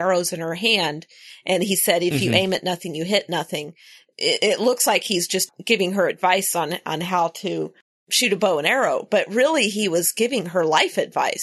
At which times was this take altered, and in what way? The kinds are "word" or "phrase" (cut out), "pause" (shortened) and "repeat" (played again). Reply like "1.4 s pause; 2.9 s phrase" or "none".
none